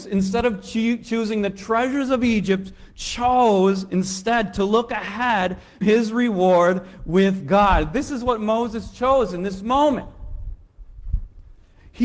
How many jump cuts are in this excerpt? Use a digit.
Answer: 1